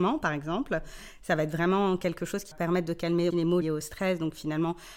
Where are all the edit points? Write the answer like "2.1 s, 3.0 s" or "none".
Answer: 2.5 s, 3.3 s, 3.6 s

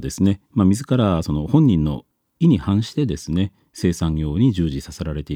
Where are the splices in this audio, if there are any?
none

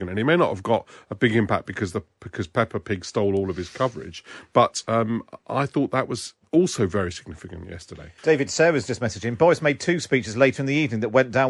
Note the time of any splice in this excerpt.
8.2 s

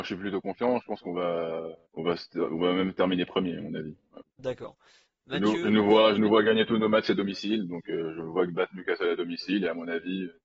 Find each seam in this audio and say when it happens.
1.9 s, 4.3 s

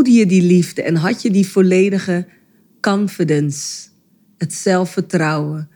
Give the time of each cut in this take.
none

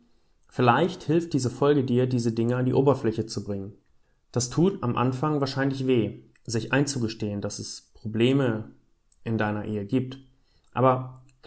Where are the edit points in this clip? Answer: 6.3 s

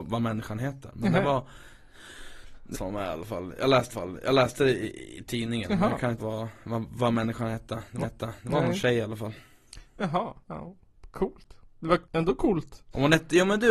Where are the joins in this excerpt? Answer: 2.7 s, 3.9 s, 6.2 s, 8.0 s, 10.4 s, 12.0 s

